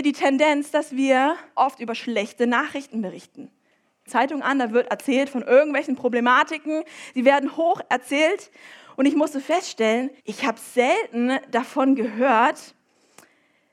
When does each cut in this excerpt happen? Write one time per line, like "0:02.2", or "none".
0:01.6
0:04.1
0:10.2

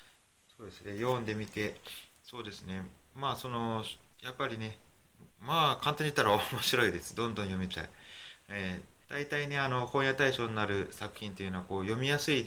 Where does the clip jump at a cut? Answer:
0:04.1
0:05.3
0:09.0

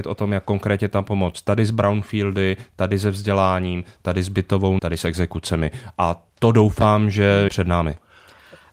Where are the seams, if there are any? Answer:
0:04.8
0:06.3
0:07.5

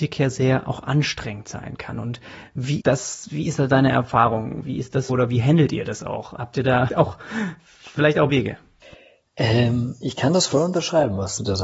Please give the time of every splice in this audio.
0:02.8
0:05.1
0:06.9
0:08.3

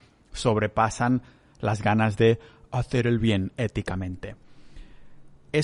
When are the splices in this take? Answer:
none

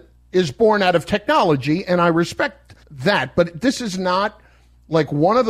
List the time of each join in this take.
0:02.8

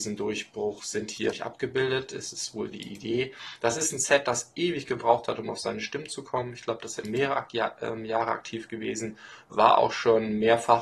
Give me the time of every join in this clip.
0:01.3
0:02.7
0:07.0

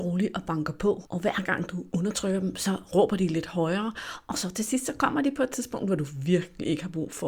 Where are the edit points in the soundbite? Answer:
0:01.1

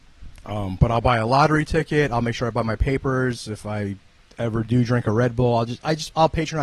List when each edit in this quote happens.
none

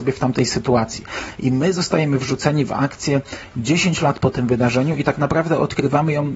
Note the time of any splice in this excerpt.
none

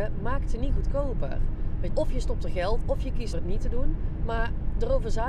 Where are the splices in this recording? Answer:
0:01.9
0:02.8
0:03.3

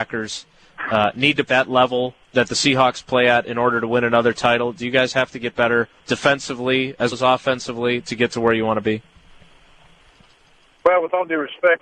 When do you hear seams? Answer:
0:01.4
0:02.2
0:06.0
0:07.1

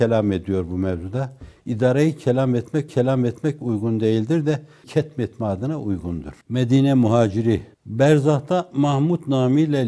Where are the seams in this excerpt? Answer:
0:02.9
0:04.8
0:06.4
0:07.7

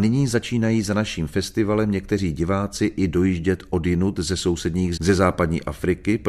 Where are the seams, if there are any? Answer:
0:05.0

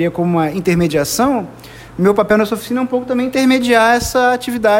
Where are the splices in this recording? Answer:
none

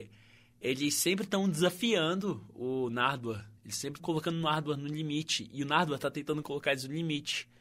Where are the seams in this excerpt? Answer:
0:03.6
0:04.0

